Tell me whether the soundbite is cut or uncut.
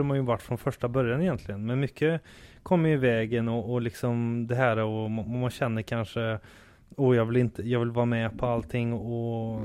uncut